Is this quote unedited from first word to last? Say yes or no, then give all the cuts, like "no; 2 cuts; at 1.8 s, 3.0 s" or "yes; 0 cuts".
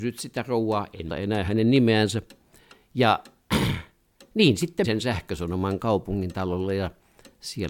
no; 3 cuts; at 1.1 s, 4.8 s, 5.8 s